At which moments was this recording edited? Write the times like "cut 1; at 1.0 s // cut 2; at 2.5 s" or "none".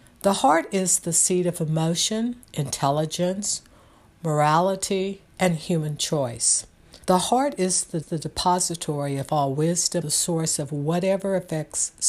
cut 1; at 2.4 s // cut 2; at 5.3 s // cut 3; at 7.0 s // cut 4; at 8.0 s // cut 5; at 10.0 s